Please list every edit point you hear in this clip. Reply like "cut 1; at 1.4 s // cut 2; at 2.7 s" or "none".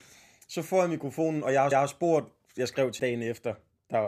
cut 1; at 1.7 s // cut 2; at 3.0 s